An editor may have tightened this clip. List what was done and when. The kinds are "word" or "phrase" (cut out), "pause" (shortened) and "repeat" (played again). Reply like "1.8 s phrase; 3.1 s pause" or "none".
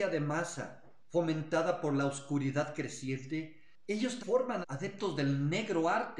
4.2 s word; 4.6 s word